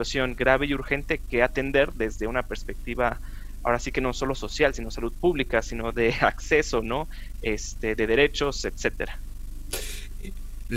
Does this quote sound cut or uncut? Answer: uncut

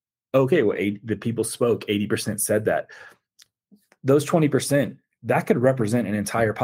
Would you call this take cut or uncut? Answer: uncut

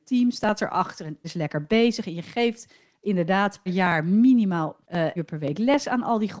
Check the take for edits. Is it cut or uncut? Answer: cut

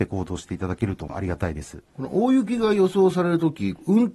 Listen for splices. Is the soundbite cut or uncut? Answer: cut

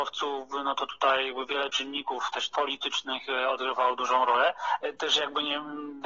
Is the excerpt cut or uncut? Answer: cut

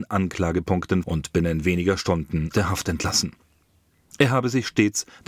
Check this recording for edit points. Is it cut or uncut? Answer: cut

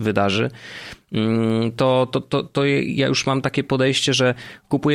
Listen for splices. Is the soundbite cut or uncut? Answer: uncut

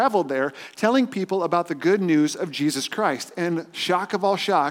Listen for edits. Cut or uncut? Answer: uncut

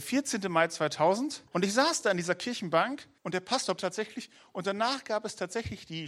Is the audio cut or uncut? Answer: cut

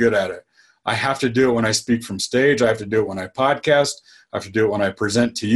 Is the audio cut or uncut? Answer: uncut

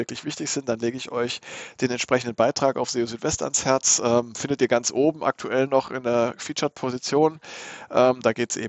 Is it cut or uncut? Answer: uncut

